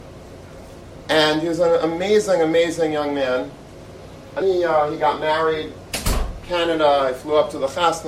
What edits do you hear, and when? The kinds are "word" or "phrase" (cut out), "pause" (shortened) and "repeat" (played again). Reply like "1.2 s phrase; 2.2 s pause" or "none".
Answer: 4.4 s word